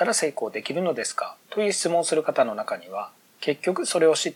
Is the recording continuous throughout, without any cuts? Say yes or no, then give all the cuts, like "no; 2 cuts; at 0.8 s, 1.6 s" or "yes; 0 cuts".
no; 1 cut; at 1.4 s